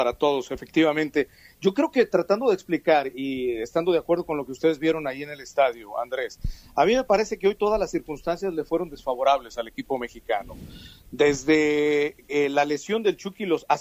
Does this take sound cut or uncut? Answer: uncut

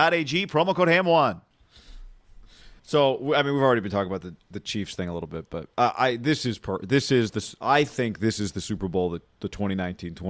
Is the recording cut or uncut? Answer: cut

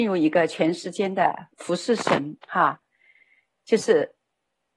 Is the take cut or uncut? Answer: cut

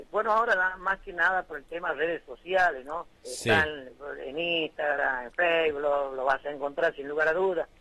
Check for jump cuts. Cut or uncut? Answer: cut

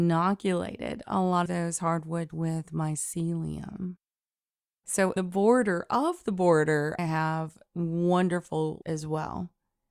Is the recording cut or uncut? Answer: cut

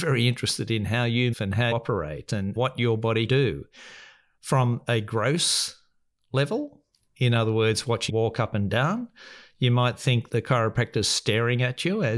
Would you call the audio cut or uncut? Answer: cut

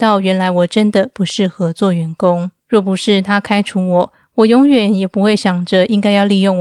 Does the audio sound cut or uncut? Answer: cut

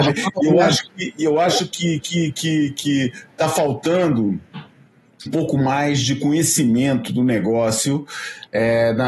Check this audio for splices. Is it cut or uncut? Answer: cut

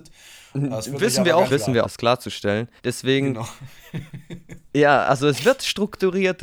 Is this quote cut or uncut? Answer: cut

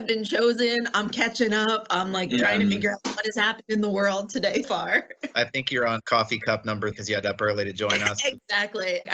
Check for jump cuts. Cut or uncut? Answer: cut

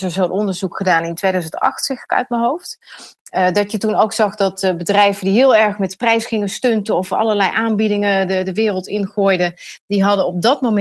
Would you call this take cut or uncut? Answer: uncut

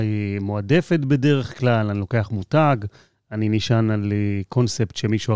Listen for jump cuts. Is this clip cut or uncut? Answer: uncut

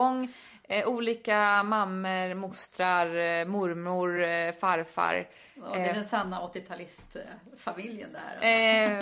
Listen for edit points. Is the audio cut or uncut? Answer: uncut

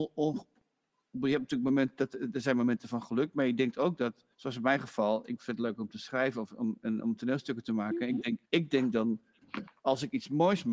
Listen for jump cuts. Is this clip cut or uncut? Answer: cut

